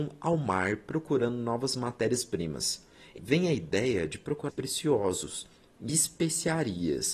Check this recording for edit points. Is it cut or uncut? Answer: cut